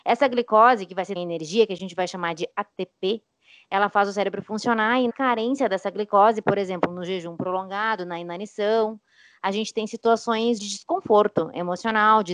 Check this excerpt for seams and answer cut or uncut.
cut